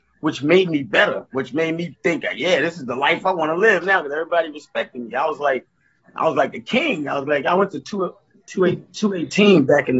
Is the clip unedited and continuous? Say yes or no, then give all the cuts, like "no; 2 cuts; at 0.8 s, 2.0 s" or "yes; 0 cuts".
yes; 0 cuts